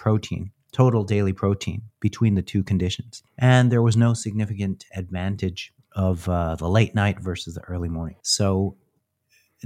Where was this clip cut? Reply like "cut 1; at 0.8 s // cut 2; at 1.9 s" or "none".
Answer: cut 1; at 3.3 s // cut 2; at 5.8 s // cut 3; at 8.2 s